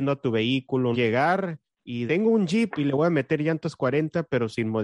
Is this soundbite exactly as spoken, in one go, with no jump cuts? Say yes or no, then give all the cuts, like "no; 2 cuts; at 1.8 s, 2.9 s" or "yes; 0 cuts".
no; 2 cuts; at 0.9 s, 2.1 s